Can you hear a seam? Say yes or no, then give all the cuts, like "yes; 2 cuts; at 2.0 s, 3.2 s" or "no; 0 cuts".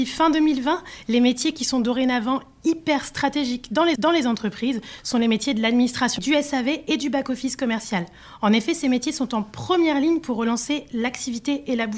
yes; 2 cuts; at 4.0 s, 6.2 s